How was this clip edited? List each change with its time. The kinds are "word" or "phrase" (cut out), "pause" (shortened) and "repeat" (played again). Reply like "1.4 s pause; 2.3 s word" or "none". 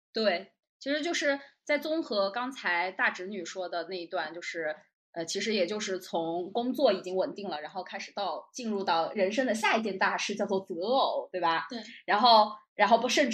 none